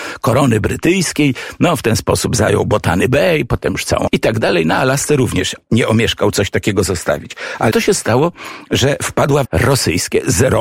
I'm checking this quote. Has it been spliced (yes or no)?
yes